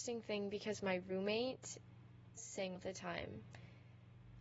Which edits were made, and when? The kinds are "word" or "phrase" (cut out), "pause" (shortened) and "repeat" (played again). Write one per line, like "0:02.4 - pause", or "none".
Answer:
0:02.4 - word
0:02.8 - word